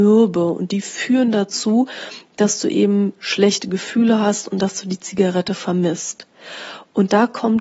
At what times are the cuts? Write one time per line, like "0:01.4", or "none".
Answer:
none